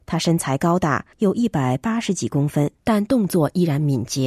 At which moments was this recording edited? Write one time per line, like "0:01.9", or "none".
0:01.1
0:02.8